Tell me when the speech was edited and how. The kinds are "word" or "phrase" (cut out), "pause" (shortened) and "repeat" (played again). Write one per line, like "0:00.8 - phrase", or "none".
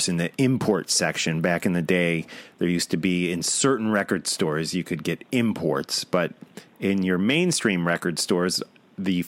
none